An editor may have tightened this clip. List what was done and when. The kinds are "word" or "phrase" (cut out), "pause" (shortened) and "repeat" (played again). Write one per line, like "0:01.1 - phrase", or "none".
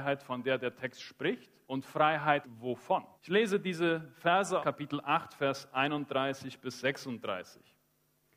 0:01.6 - pause
0:02.4 - word
0:03.2 - pause
0:04.6 - phrase